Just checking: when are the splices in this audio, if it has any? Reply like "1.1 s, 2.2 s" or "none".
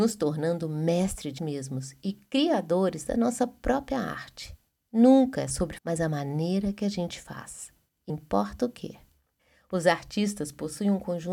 1.4 s, 5.8 s, 8.1 s